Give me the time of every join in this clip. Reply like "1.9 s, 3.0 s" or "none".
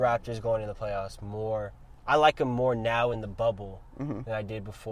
none